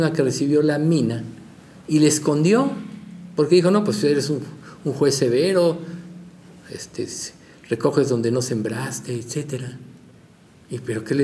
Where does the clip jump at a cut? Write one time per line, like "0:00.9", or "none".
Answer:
none